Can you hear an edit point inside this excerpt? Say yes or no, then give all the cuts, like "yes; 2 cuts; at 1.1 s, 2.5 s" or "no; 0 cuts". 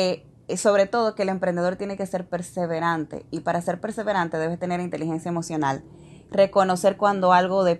no; 0 cuts